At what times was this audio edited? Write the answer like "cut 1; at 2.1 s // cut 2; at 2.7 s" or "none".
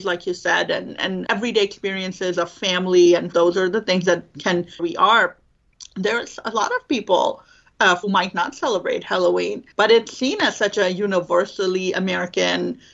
cut 1; at 1.3 s // cut 2; at 3.3 s // cut 3; at 4.8 s // cut 4; at 8.0 s // cut 5; at 9.7 s